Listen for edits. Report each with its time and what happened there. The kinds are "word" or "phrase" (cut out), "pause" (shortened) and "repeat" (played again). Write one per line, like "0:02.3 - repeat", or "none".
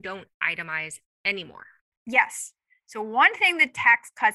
none